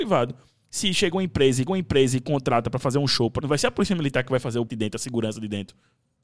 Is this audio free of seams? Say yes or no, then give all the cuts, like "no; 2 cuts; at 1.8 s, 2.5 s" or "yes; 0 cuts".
no; 3 cuts; at 1.7 s, 3.4 s, 4.7 s